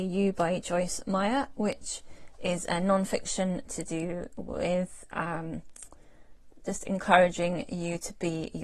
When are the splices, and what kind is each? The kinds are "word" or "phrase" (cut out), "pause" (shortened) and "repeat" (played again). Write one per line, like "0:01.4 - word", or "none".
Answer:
none